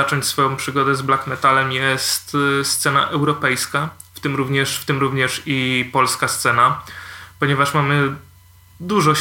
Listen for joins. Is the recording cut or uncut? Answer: uncut